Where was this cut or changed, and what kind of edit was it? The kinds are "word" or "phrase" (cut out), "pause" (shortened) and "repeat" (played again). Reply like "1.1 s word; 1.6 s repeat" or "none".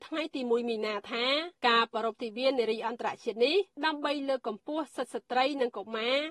1.6 s pause; 3.7 s pause